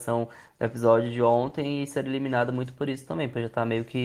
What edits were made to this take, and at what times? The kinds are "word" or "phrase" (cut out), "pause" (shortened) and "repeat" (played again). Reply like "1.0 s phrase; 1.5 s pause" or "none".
none